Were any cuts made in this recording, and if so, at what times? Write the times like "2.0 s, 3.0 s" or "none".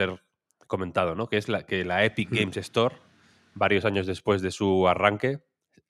none